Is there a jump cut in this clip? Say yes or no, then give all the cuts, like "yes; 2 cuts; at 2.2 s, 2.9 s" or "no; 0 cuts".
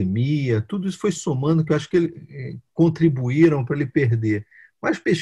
no; 0 cuts